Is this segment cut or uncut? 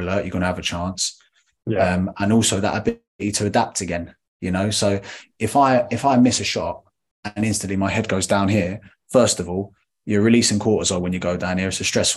uncut